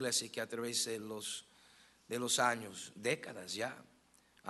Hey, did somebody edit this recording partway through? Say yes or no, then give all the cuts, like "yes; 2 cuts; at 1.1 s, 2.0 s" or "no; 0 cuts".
no; 0 cuts